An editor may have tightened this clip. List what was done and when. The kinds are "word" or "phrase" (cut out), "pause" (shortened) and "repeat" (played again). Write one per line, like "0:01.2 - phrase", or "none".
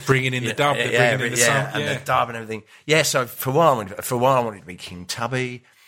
none